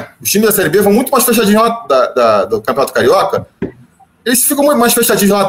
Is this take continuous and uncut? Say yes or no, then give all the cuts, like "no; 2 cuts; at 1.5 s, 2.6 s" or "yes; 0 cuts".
yes; 0 cuts